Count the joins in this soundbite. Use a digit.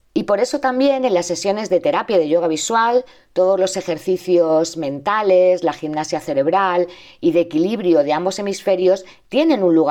0